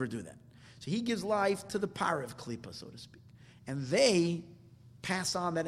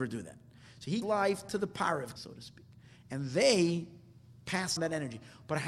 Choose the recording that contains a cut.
second; 3 cuts; at 1.0 s, 2.2 s, 4.8 s

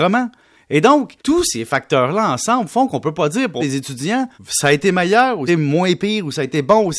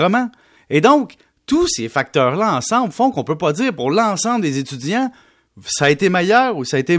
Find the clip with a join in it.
first; 4 cuts; at 1.2 s, 3.6 s, 4.3 s, 5.5 s

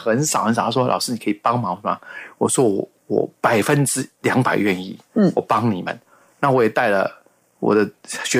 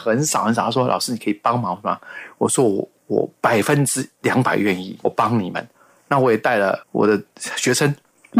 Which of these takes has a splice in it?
second; 2 cuts; at 5.0 s, 6.8 s

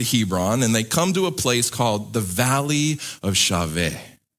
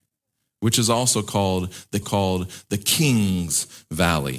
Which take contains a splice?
second; 1 cut; at 2.0 s

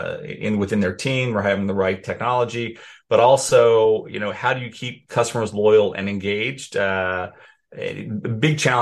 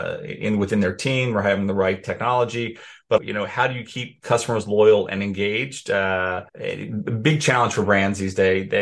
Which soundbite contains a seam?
second; 2 cuts; at 3.2 s, 6.5 s

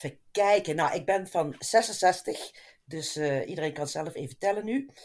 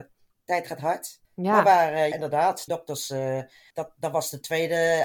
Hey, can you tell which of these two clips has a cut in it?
second; 4 cuts; at 1.2 s, 2.1 s, 2.7 s, 3.7 s

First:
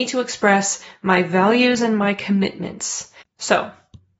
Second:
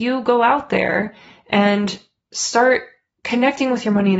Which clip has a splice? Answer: first; 1 cut; at 3.2 s

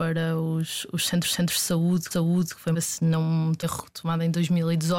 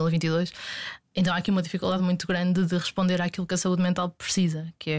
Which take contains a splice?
first; 4 cuts; at 1.2 s, 2.1 s, 2.7 s, 3.6 s

